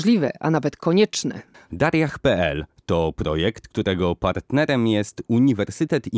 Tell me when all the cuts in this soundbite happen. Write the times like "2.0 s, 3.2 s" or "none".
1.5 s